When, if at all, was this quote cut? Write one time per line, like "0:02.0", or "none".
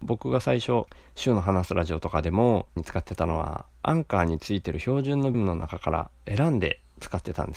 0:02.8
0:05.3